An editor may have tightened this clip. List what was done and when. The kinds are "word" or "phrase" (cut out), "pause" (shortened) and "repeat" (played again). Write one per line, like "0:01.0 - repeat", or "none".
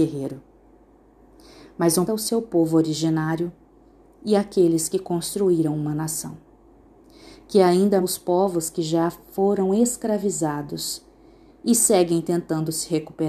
0:02.1 - phrase
0:08.0 - word

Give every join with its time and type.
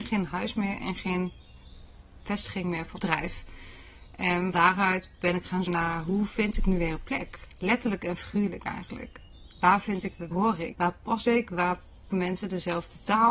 0:02.9 - word
0:04.5 - word
0:05.7 - word
0:10.3 - word
0:10.7 - word
0:12.1 - word

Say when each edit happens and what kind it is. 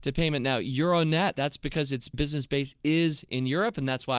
0:01.4 - word
0:02.1 - word

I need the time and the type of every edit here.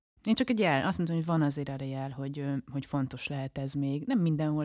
none

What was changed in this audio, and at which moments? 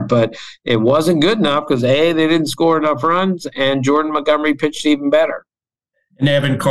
none

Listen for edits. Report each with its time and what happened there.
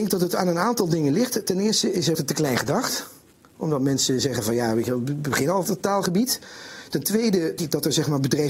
0:02.1 - word
0:05.6 - word
0:07.6 - word

